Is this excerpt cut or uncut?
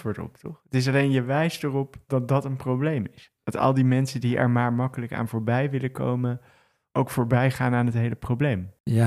uncut